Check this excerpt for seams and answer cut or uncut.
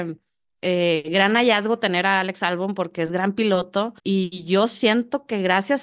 cut